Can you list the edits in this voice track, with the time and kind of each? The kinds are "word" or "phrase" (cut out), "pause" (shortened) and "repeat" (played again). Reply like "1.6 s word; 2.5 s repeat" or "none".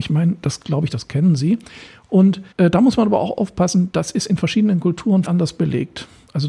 2.5 s pause; 5.2 s word